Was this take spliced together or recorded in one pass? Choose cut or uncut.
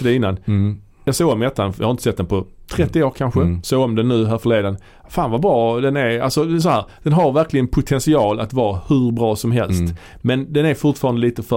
uncut